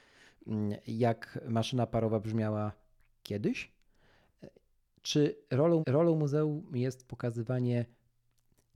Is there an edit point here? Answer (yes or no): yes